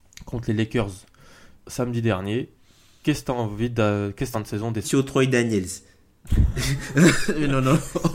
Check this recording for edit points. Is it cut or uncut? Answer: cut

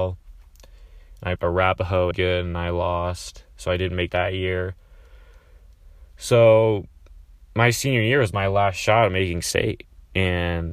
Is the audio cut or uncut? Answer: cut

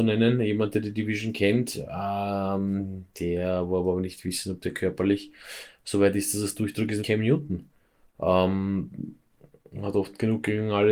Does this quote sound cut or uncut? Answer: cut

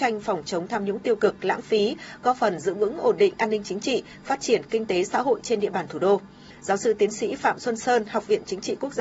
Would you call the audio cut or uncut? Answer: uncut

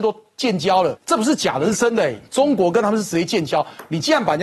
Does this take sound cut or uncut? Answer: cut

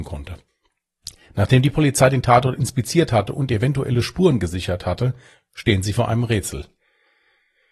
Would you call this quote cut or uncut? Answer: uncut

